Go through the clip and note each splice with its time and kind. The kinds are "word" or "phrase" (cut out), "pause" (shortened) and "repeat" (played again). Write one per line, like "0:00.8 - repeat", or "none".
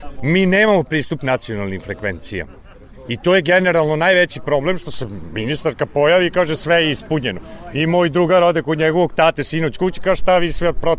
none